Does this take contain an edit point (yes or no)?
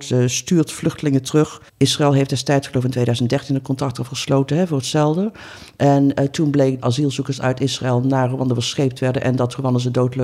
yes